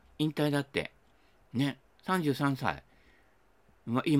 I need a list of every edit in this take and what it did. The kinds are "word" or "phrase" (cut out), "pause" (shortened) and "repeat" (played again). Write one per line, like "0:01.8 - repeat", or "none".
none